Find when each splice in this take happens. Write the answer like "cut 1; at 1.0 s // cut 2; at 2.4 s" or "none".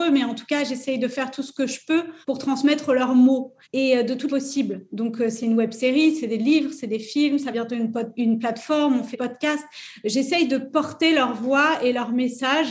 cut 1; at 2.2 s // cut 2; at 3.6 s // cut 3; at 4.3 s // cut 4; at 7.5 s // cut 5; at 8.1 s // cut 6; at 9.1 s